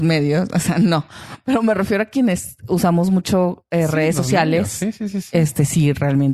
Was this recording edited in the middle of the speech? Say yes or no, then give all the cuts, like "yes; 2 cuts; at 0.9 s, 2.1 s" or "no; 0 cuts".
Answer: no; 0 cuts